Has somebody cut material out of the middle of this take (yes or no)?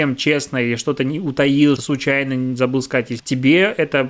yes